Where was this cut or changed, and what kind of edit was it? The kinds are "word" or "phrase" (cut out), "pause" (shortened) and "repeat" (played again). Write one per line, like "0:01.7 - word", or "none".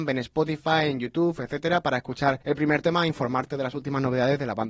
0:02.4 - pause